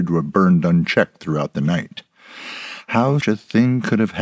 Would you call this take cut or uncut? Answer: cut